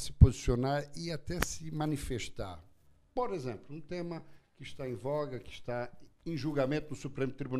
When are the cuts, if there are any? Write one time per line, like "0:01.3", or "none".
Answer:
none